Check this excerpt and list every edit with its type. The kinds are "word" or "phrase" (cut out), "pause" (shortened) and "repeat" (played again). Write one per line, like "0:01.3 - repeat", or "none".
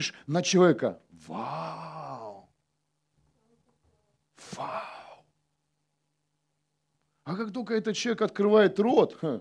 none